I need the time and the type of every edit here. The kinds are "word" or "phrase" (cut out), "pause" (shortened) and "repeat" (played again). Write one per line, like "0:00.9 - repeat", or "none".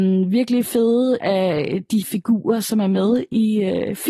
0:01.2 - word
0:02.0 - word